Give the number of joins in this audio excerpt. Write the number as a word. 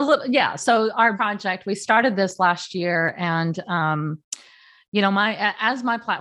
one